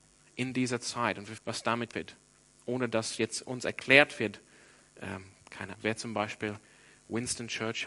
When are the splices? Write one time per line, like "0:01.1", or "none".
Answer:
0:01.4
0:01.9
0:05.7